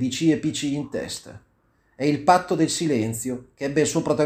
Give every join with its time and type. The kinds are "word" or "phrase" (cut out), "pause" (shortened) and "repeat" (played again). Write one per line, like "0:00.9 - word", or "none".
none